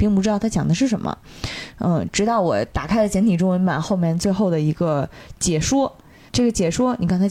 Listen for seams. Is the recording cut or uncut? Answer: cut